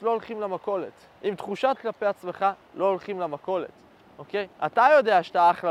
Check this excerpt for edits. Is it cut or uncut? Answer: cut